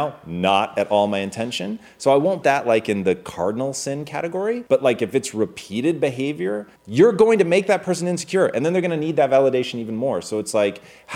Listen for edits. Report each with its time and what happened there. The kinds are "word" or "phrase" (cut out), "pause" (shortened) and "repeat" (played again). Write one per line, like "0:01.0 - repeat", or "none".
0:02.4 - word
0:04.7 - pause
0:06.8 - pause